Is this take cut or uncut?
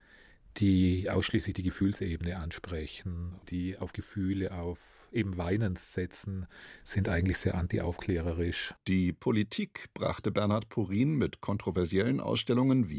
cut